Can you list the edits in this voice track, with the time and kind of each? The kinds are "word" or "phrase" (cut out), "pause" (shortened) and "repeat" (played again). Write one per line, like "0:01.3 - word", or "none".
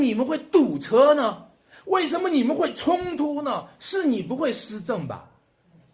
none